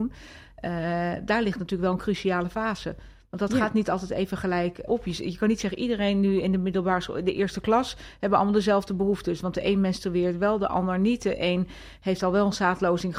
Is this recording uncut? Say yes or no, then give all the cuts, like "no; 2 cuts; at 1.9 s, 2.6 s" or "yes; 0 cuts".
no; 1 cut; at 4.9 s